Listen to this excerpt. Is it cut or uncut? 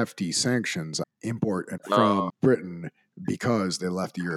cut